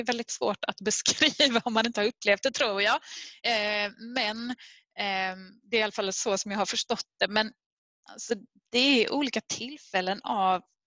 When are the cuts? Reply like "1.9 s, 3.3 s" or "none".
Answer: none